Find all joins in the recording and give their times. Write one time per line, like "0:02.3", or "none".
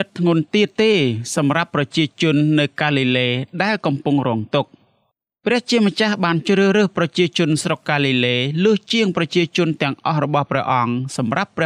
none